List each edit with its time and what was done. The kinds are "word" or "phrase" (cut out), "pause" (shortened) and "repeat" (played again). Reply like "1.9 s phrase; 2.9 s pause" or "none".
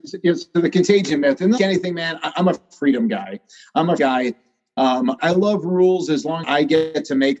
1.6 s word; 4.0 s word; 5.2 s word; 6.4 s word